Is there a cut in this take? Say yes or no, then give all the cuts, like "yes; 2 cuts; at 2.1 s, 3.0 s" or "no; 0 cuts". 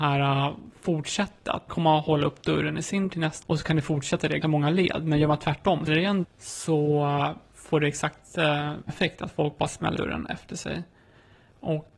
yes; 8 cuts; at 1.7 s, 3.1 s, 3.4 s, 4.4 s, 5.9 s, 6.2 s, 8.9 s, 10.0 s